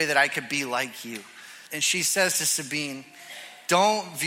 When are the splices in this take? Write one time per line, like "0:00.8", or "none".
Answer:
0:01.7

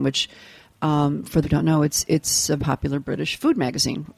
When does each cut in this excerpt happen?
0:01.4
0:02.6

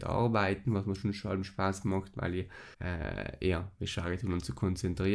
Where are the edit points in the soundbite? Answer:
0:02.7

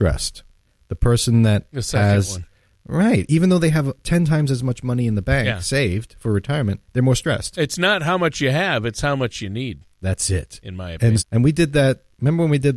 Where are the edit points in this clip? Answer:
0:09.9
0:11.2

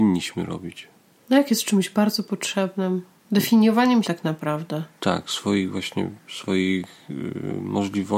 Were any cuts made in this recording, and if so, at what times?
0:04.0
0:05.0
0:06.3

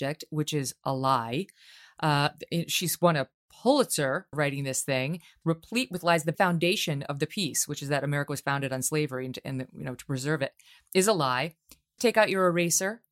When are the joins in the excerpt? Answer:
0:04.3
0:05.4
0:06.3
0:12.0

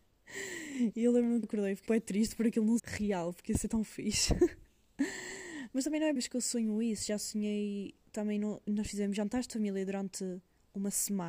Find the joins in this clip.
0:01.4
0:01.9
0:02.8
0:06.2
0:08.0
0:08.7

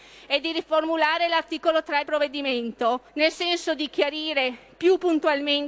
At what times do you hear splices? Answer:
0:02.1
0:03.1

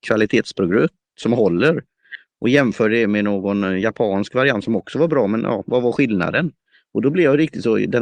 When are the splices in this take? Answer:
none

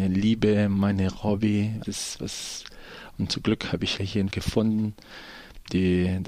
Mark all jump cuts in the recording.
0:01.8
0:04.0
0:04.3

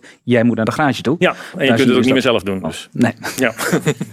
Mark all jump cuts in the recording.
none

